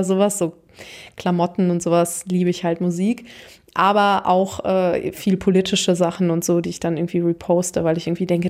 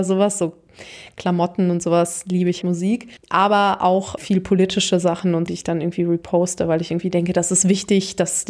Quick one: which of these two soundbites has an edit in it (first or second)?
second